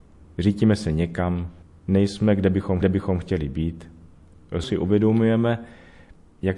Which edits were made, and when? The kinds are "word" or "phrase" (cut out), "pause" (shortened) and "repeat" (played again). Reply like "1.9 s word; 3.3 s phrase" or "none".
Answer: 1.6 s pause; 2.8 s repeat; 4.6 s word